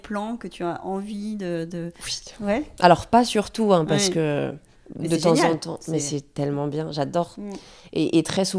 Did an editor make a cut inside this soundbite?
no; 0 cuts

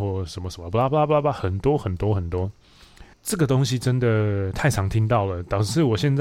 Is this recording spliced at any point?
yes; 1 cut; at 3.1 s

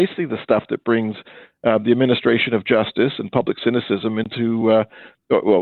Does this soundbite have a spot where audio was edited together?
no; 0 cuts

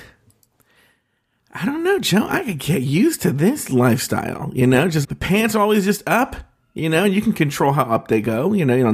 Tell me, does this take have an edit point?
yes; 1 cut; at 5.0 s

